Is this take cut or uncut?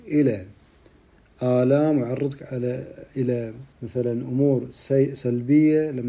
cut